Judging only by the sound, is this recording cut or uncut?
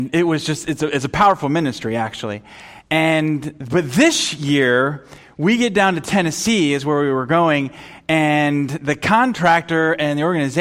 uncut